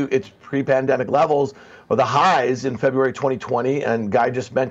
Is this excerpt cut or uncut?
uncut